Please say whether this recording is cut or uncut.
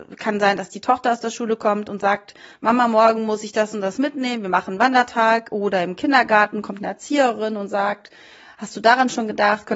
uncut